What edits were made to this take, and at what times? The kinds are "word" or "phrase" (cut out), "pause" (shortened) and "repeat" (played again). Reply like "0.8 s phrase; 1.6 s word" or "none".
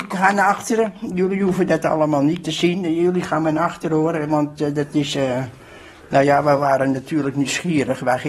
none